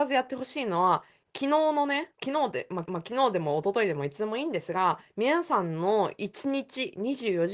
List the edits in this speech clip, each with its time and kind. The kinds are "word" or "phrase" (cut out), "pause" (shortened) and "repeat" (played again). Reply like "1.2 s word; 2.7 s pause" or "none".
2.1 s pause; 2.9 s repeat